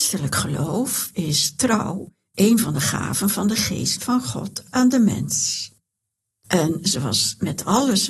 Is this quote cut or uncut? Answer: uncut